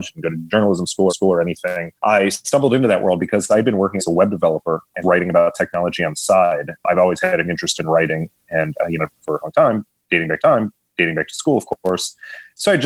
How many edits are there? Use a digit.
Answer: 7